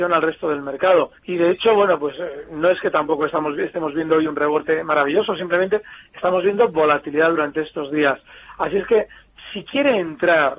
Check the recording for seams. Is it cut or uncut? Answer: cut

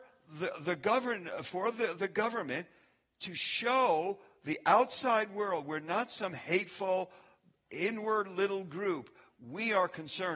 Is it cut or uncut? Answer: uncut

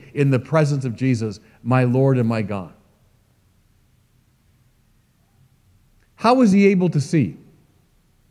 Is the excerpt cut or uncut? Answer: uncut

